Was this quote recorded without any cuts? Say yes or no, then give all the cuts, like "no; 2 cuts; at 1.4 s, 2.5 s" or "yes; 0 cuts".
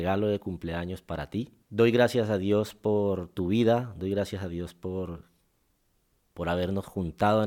no; 1 cut; at 1.6 s